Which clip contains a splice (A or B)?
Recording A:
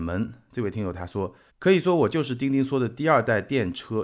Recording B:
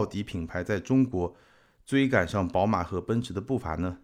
A